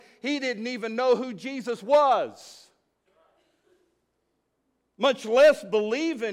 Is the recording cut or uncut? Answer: uncut